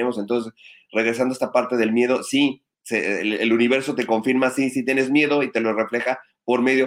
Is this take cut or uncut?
cut